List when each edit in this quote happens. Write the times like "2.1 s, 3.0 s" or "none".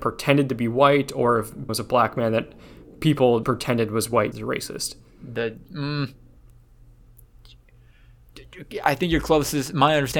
1.7 s, 3.4 s, 4.3 s